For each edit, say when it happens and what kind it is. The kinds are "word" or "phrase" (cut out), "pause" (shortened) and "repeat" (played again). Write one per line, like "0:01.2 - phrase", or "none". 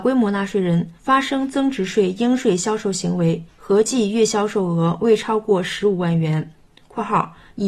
0:01.0 - pause
0:03.5 - pause
0:06.5 - pause

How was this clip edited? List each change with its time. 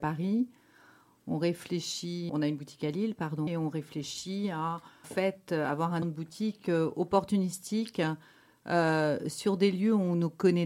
0:02.3 - word
0:03.5 - word
0:05.0 - word
0:06.0 - word

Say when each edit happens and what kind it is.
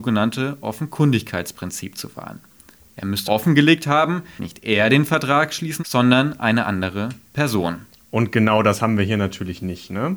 0:03.3 - word
0:04.4 - word
0:05.8 - word

